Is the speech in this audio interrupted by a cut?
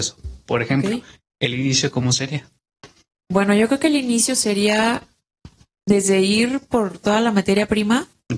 no; 0 cuts

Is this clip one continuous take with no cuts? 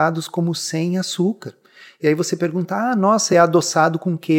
yes; 0 cuts

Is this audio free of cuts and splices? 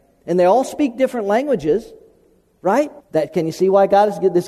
no; 1 cut; at 3.0 s

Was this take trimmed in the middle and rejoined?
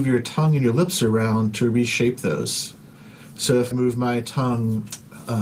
yes; 1 cut; at 3.7 s

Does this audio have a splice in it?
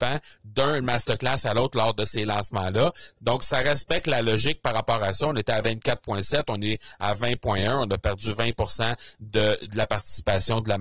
no; 0 cuts

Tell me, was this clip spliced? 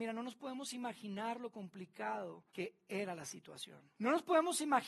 yes; 2 cuts; at 2.5 s, 3.9 s

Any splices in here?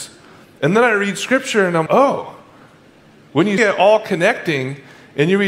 yes; 2 cuts; at 1.9 s, 3.6 s

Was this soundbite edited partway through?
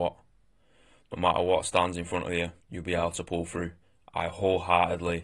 yes; 2 cuts; at 2.6 s, 3.8 s

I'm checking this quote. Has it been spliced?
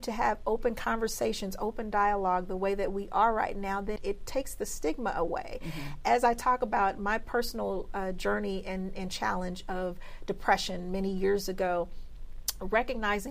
yes; 1 cut; at 4.0 s

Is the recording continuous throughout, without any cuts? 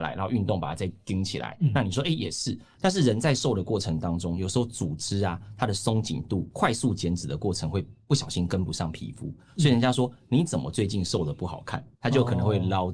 yes; 0 cuts

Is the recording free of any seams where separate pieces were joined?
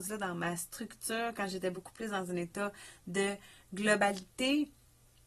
yes; 0 cuts

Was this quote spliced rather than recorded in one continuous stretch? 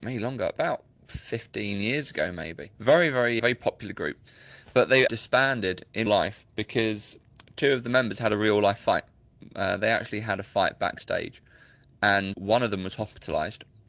yes; 7 cuts; at 0.9 s, 2.7 s, 3.4 s, 5.1 s, 6.1 s, 6.5 s, 12.3 s

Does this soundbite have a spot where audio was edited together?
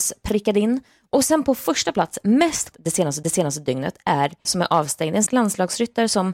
yes; 4 cuts; at 2.7 s, 3.2 s, 4.4 s, 5.3 s

